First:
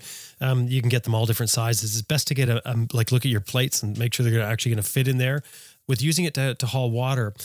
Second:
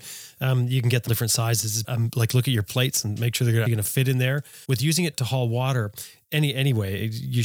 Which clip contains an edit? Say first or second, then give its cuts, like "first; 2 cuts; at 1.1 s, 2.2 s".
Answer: second; 5 cuts; at 1.1 s, 1.8 s, 3.7 s, 4.6 s, 5.1 s